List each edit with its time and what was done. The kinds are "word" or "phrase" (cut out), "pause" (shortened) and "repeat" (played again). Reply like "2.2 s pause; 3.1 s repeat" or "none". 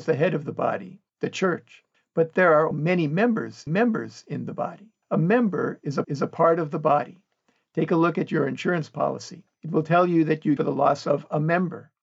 1.1 s pause; 1.9 s pause; 2.7 s word; 3.7 s repeat; 5.0 s pause; 6.0 s repeat; 9.5 s pause; 10.6 s phrase